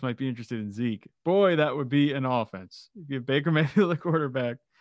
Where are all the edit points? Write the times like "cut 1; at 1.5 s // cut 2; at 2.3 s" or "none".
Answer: none